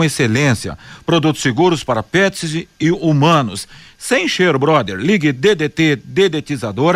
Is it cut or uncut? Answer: uncut